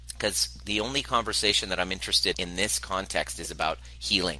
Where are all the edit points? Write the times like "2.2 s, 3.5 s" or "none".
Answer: 2.3 s